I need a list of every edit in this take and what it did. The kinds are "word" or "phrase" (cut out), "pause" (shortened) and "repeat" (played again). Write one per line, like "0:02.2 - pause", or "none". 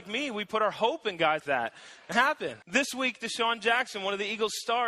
0:01.4 - word
0:02.1 - phrase
0:02.6 - pause